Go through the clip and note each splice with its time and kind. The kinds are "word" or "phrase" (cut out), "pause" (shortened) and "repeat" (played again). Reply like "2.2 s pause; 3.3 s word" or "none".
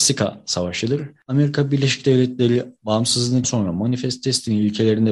3.4 s word